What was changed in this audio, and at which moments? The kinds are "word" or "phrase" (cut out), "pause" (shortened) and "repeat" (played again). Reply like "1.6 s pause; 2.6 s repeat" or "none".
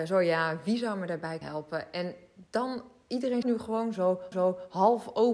1.4 s word; 3.4 s word; 4.3 s repeat